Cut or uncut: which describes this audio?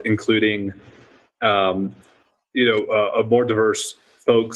uncut